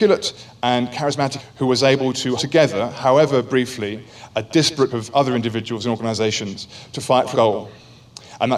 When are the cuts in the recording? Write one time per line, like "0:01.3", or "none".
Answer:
0:01.4
0:02.4
0:04.9
0:07.3